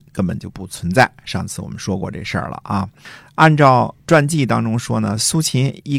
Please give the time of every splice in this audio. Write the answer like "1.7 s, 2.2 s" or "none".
4.0 s

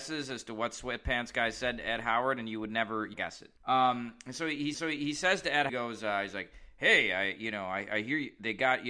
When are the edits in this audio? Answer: 3.1 s, 3.6 s, 4.7 s, 5.7 s

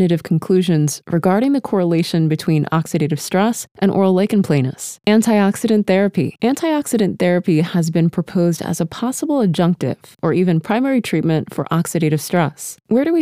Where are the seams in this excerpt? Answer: none

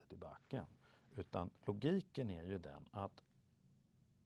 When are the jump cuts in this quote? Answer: 1.6 s

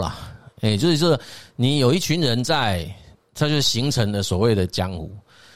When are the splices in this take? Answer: none

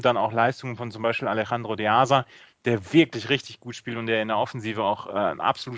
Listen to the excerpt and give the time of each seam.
none

